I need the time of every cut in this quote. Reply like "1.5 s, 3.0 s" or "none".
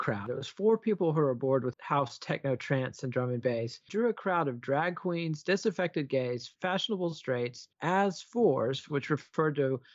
1.7 s, 3.9 s, 6.6 s, 7.7 s